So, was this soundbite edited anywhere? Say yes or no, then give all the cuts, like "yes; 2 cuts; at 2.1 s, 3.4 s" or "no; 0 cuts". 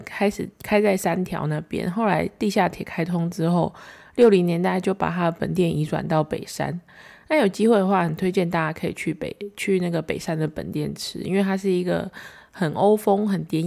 no; 0 cuts